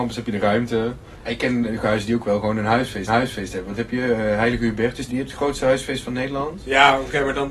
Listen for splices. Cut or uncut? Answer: cut